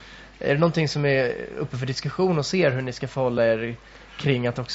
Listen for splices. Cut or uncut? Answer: uncut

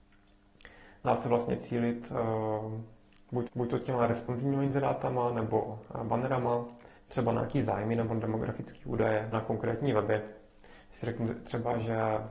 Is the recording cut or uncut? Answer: cut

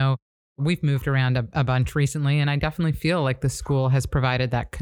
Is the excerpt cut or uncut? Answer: uncut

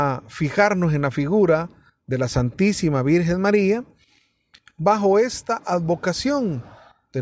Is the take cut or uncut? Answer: uncut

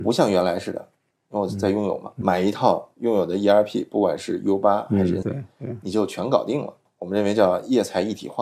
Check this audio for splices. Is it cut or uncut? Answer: cut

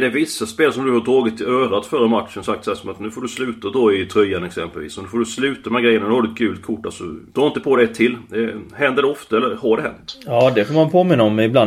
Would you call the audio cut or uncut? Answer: cut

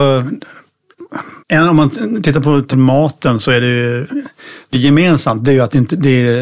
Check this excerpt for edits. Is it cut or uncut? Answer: cut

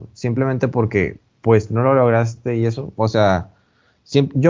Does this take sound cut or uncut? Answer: uncut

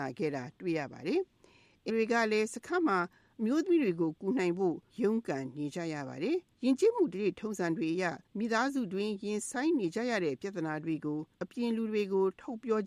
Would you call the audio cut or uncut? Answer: cut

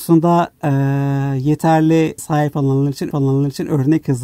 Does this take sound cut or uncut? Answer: cut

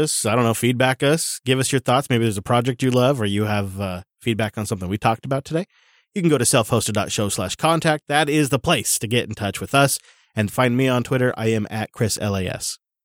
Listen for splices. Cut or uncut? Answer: uncut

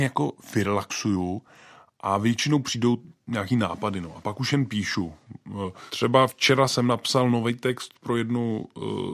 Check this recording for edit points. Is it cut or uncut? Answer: uncut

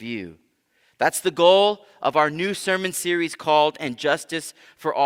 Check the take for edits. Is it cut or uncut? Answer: uncut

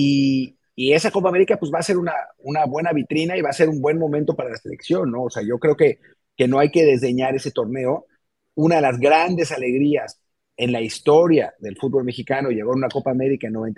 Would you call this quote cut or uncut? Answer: uncut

